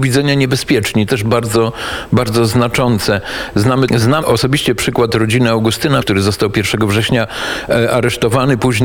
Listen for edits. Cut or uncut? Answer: cut